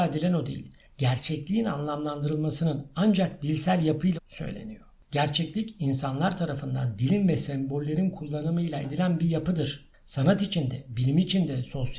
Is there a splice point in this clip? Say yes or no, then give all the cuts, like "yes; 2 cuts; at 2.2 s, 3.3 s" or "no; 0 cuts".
yes; 2 cuts; at 4.1 s, 8.8 s